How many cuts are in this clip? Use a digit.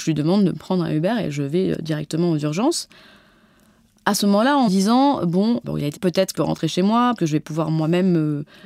6